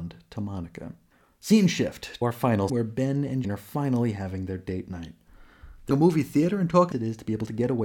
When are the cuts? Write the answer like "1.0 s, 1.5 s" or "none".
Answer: 1.1 s, 2.2 s, 2.7 s, 3.4 s, 5.9 s, 6.9 s